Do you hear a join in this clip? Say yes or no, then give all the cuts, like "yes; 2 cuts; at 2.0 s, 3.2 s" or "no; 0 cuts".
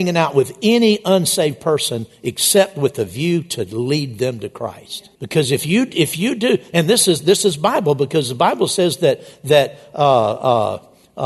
yes; 1 cut; at 5.1 s